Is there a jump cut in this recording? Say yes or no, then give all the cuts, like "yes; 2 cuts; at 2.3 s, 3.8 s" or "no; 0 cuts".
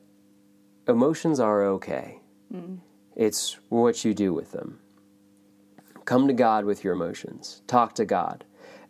no; 0 cuts